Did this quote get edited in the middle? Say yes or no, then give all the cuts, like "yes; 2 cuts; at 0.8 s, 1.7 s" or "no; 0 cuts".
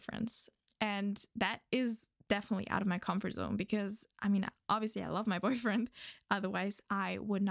no; 0 cuts